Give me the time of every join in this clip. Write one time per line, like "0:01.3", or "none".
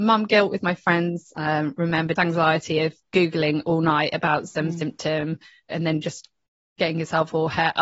0:02.2